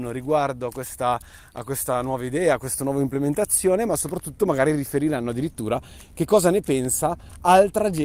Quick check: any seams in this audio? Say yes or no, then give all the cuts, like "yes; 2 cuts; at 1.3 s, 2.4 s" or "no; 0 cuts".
no; 0 cuts